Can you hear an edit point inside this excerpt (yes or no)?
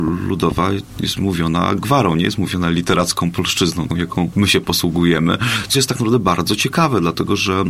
yes